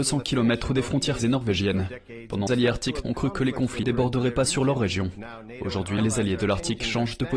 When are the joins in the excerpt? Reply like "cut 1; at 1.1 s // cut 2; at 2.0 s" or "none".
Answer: cut 1; at 1.2 s // cut 2; at 2.5 s // cut 3; at 3.0 s // cut 4; at 3.8 s // cut 5; at 6.0 s